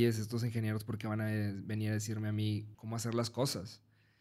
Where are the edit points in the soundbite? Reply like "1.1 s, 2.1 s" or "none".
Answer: 2.7 s